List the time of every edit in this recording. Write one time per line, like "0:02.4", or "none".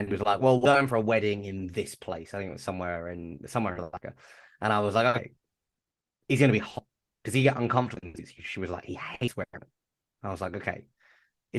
none